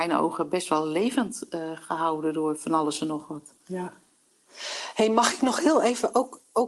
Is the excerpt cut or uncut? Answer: uncut